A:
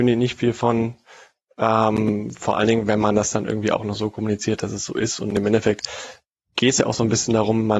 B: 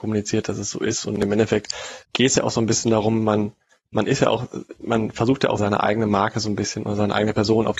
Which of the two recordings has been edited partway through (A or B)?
B